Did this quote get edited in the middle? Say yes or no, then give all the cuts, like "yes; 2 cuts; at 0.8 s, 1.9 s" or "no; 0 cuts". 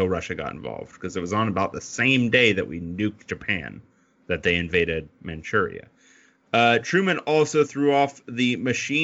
no; 0 cuts